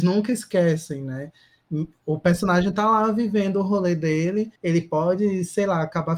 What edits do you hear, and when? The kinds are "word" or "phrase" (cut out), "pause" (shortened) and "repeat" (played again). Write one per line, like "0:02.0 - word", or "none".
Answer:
0:04.6 - pause